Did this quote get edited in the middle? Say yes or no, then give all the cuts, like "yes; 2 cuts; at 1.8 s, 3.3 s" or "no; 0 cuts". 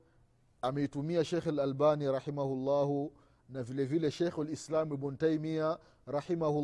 no; 0 cuts